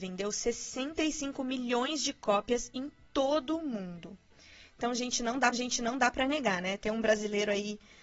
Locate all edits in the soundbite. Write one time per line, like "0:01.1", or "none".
0:05.5